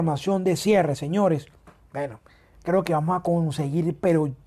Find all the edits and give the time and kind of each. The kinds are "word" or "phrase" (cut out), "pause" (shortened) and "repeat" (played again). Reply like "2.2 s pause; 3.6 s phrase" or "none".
none